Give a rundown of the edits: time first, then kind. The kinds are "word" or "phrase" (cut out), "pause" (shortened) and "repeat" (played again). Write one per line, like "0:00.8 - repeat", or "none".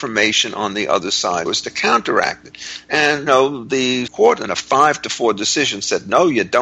0:01.5 - word
0:03.3 - word
0:04.1 - word